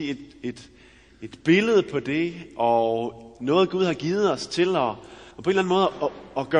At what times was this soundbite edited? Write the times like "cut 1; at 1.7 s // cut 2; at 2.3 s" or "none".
cut 1; at 5.3 s